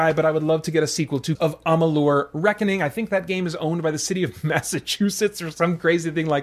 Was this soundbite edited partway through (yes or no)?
yes